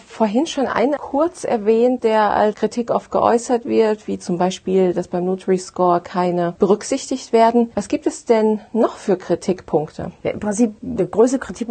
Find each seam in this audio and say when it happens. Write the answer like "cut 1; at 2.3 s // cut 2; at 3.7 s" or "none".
cut 1; at 1.0 s // cut 2; at 6.5 s